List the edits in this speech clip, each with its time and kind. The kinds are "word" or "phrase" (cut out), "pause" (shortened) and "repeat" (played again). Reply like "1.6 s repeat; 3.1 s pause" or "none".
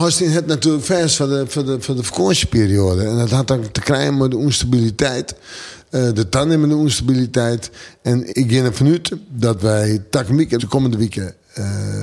8.3 s word; 10.6 s word